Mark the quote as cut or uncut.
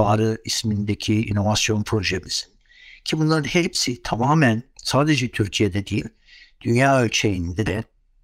uncut